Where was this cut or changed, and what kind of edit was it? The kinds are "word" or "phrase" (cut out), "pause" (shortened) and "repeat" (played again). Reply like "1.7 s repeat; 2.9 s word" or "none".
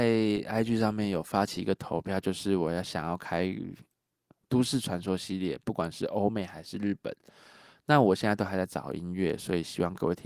none